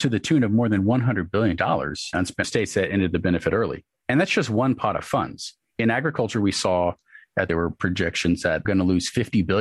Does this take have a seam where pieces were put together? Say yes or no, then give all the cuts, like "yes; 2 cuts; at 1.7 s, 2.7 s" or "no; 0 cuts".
yes; 4 cuts; at 2.1 s, 2.4 s, 7.5 s, 8.6 s